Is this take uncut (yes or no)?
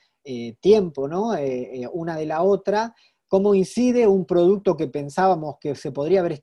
yes